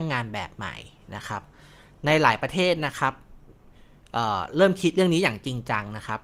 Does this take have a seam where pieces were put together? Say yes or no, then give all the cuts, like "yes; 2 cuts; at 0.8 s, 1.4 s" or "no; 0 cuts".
no; 0 cuts